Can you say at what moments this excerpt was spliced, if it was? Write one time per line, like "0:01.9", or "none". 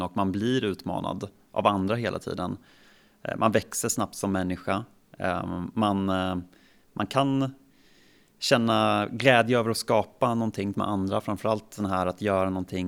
0:10.7